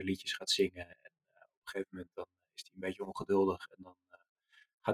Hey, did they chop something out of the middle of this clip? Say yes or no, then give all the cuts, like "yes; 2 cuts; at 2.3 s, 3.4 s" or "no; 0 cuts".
no; 0 cuts